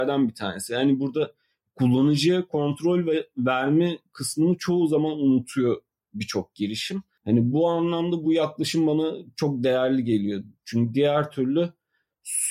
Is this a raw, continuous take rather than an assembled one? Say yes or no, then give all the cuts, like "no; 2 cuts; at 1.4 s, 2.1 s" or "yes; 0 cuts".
yes; 0 cuts